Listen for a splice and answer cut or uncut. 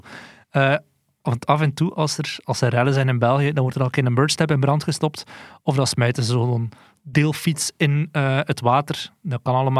uncut